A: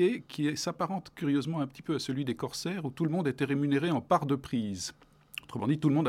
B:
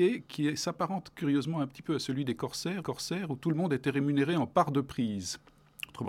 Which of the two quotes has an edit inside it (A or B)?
B